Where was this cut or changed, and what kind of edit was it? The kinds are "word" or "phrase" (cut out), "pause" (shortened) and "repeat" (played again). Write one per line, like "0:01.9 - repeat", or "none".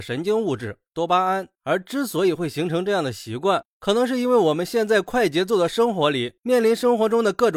0:01.5 - pause